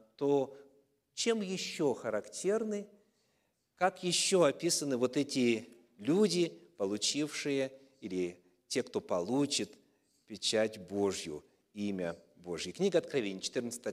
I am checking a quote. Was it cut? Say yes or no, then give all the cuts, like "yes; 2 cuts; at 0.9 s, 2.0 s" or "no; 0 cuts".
no; 0 cuts